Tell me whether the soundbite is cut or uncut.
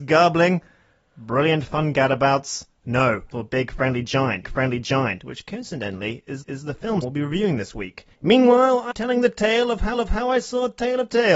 cut